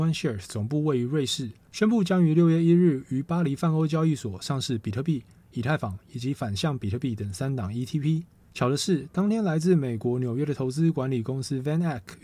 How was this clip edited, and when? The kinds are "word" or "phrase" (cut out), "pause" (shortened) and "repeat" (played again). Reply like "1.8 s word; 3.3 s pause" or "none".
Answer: none